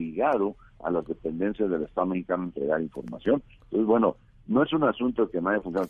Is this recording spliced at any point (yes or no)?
no